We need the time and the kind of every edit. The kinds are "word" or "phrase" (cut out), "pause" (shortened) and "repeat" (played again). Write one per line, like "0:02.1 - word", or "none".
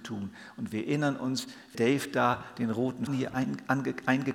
0:01.7 - word
0:03.1 - word